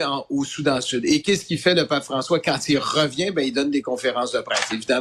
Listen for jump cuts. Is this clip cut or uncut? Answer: uncut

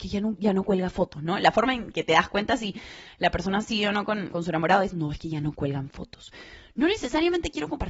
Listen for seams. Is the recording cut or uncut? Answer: cut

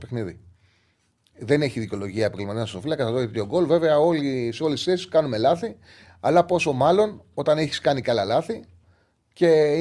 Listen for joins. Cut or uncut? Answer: uncut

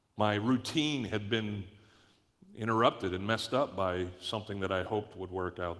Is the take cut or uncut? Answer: uncut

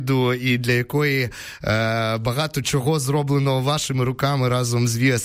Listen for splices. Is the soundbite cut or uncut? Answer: uncut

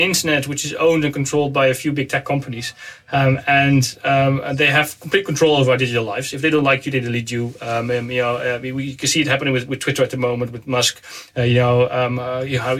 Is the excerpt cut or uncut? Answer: uncut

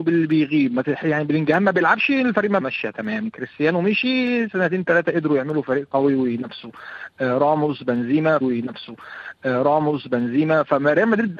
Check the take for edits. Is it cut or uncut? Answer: cut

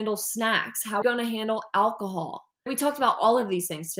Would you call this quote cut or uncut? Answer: cut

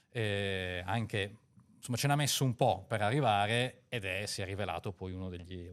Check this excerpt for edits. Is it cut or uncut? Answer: uncut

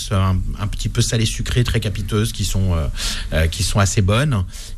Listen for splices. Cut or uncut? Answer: uncut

